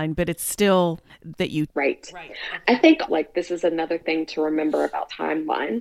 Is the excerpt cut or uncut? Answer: cut